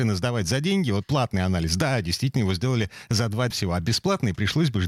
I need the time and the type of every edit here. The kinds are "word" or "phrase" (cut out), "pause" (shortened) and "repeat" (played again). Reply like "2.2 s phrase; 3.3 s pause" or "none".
1.0 s word; 3.5 s word